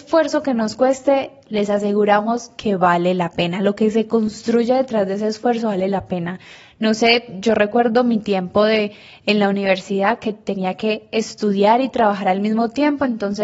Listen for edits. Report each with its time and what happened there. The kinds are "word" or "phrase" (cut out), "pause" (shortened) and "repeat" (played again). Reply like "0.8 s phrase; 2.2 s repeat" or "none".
none